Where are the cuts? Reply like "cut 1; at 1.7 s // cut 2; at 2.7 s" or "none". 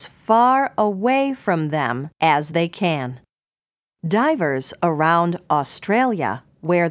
none